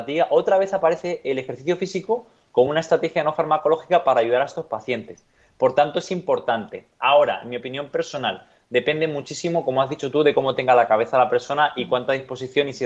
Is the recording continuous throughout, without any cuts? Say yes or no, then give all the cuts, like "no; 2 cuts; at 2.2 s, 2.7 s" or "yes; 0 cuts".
yes; 0 cuts